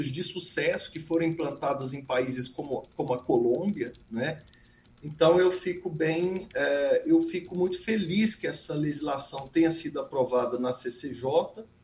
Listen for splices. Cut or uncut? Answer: uncut